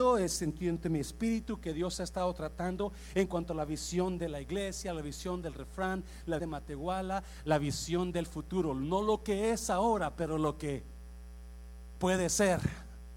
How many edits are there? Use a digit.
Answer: 1